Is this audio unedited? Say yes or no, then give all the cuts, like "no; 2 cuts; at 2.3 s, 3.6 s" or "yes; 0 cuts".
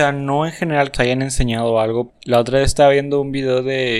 no; 2 cuts; at 0.9 s, 2.1 s